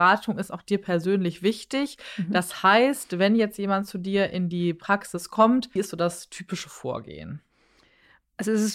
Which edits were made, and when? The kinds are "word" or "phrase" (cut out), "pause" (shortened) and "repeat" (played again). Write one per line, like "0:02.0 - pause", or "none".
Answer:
0:05.8 - word